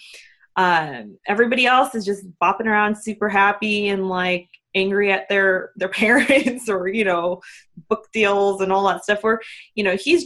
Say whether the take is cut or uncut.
uncut